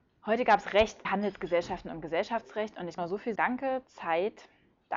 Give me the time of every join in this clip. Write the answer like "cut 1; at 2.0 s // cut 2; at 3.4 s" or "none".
cut 1; at 1.0 s // cut 2; at 3.0 s // cut 3; at 3.3 s